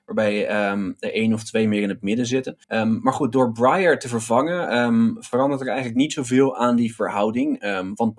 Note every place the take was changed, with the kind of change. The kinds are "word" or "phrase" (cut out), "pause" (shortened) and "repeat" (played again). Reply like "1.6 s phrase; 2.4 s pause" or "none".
2.6 s pause